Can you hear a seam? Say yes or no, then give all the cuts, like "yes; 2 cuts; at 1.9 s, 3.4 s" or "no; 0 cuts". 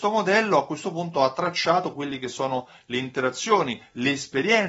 no; 0 cuts